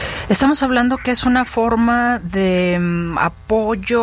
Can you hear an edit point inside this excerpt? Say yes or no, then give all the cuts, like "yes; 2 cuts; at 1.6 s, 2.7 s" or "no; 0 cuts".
no; 0 cuts